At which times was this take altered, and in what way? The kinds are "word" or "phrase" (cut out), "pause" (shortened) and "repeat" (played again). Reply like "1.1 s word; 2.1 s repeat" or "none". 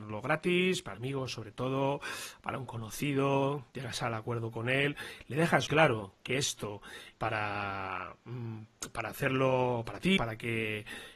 0.9 s word; 3.7 s pause; 5.7 s word; 7.1 s word; 10.2 s phrase